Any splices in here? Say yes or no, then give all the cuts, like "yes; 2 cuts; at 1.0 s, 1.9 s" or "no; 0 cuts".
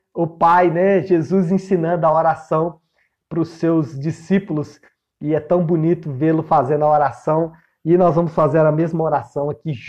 no; 0 cuts